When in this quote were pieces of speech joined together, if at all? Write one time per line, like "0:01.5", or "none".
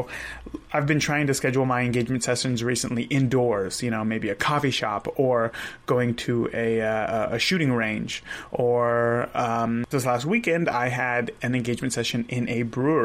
0:09.9

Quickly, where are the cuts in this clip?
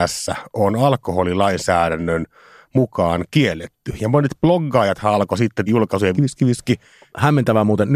0:05.7
0:06.1

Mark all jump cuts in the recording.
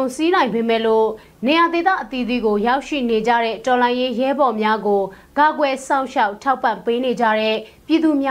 none

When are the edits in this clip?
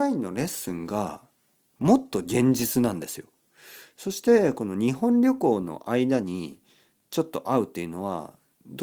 none

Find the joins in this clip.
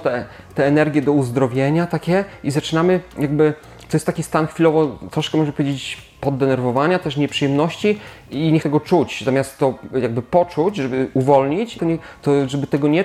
0:08.6
0:11.8

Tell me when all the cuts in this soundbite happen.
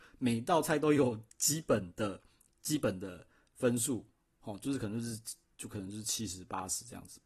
none

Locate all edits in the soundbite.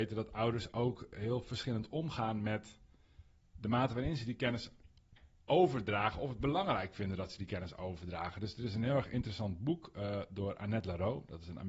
none

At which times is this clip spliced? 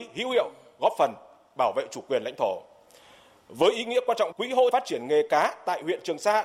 0:04.3
0:04.7

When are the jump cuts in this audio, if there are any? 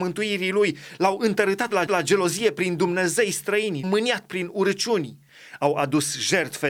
0:01.9
0:03.8

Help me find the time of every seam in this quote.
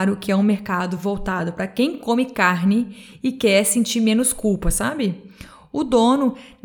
none

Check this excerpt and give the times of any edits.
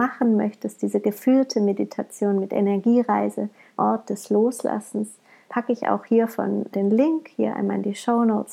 0:03.8
0:05.5
0:06.7

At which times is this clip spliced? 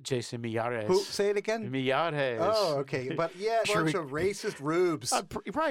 0:03.6

